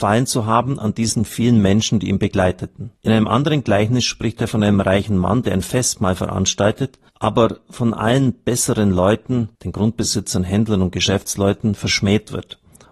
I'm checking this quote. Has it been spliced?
yes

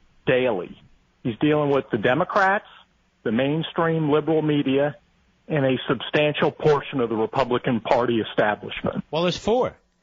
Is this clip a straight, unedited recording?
yes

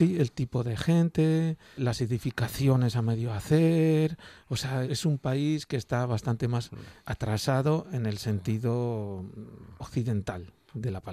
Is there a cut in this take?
yes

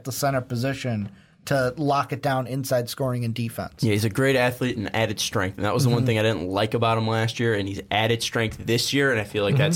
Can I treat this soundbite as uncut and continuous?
yes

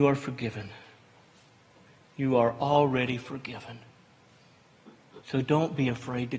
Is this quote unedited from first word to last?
no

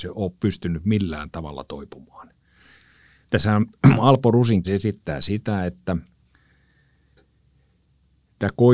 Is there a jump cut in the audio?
yes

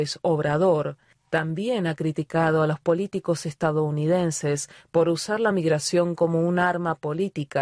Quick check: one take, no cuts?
yes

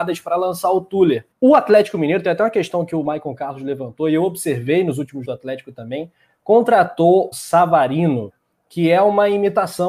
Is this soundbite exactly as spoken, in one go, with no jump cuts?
no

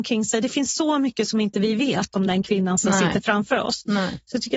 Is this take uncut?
yes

